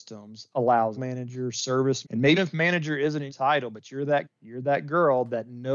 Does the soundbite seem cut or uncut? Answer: cut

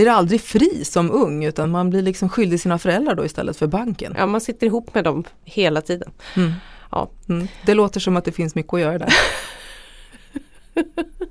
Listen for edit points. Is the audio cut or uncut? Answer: uncut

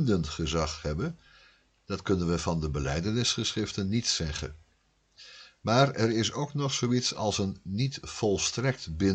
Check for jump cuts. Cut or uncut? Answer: uncut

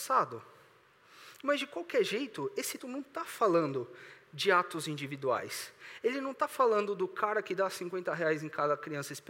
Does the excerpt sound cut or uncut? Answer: cut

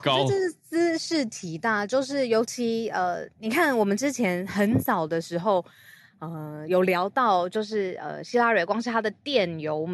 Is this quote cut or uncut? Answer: uncut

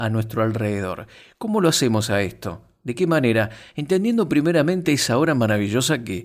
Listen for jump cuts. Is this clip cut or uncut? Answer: uncut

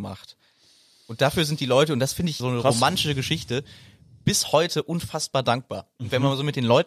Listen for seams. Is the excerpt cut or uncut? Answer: cut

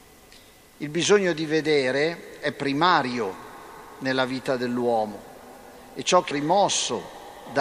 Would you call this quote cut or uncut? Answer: cut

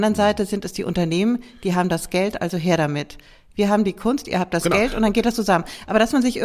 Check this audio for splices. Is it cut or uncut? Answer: uncut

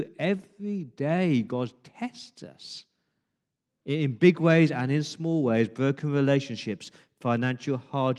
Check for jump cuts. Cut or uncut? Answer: uncut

